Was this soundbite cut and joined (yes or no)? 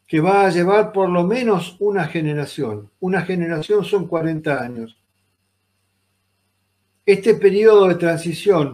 no